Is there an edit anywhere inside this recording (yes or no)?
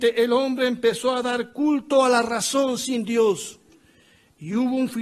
no